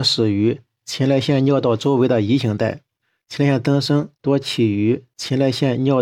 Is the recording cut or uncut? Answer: cut